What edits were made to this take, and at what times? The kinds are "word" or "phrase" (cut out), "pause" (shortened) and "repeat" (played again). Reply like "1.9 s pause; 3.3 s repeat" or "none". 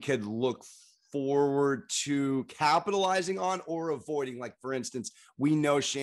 none